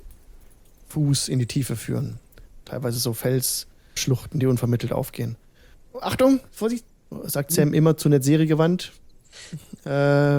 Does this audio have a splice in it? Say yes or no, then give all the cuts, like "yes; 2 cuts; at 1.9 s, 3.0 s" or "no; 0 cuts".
yes; 2 cuts; at 4.0 s, 5.7 s